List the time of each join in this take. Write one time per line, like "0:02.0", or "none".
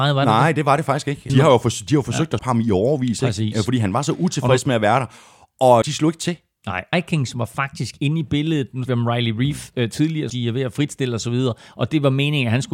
0:01.3
0:02.4
0:05.8
0:06.9
0:08.9
0:10.3